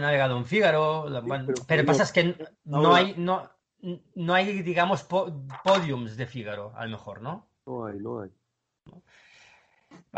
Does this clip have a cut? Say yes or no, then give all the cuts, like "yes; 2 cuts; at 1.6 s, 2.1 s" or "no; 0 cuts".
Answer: no; 0 cuts